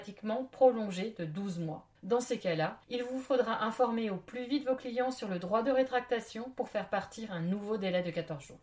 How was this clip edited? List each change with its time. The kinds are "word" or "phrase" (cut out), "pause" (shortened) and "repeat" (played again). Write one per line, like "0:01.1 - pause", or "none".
0:02.0 - pause
0:02.8 - pause